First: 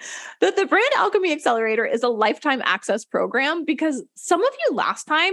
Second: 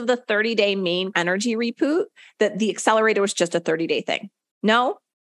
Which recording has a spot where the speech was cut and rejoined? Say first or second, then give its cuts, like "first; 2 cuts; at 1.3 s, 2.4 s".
second; 1 cut; at 1.1 s